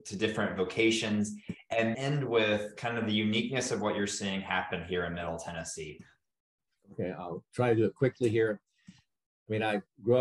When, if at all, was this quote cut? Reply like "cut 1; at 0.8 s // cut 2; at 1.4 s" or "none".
cut 1; at 1.9 s